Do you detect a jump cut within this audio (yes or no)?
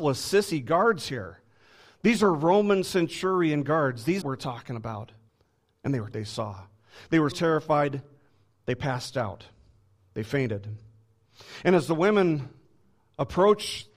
yes